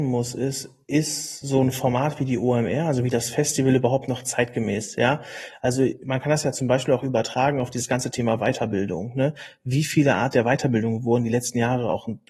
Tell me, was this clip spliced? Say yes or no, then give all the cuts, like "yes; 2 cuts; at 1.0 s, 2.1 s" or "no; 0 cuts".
no; 0 cuts